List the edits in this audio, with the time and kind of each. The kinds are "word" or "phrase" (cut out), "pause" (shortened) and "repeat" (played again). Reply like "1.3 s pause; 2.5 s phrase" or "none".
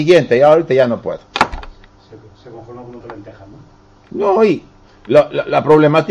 3.0 s word